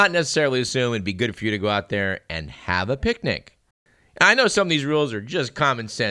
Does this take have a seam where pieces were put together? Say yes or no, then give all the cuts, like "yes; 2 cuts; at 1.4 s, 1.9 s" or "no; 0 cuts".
yes; 1 cut; at 3.7 s